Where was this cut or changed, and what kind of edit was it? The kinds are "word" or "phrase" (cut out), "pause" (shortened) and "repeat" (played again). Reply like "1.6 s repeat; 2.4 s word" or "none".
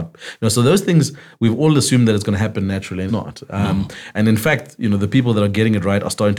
3.1 s word